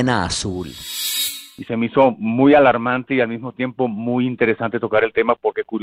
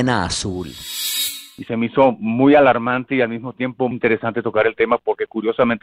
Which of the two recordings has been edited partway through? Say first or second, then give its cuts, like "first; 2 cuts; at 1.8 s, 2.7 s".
second; 1 cut; at 3.9 s